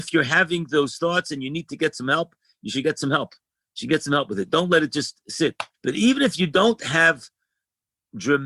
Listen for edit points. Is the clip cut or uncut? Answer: cut